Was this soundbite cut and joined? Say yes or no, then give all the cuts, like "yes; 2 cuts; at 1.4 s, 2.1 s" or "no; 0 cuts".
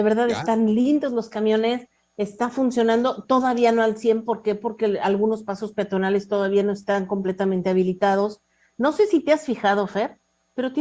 no; 0 cuts